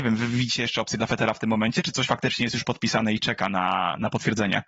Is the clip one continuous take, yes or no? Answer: yes